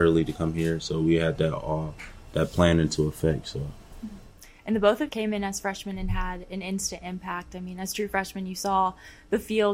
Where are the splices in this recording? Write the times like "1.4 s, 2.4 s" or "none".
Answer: 5.1 s